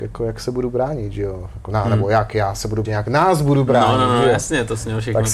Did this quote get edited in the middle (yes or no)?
yes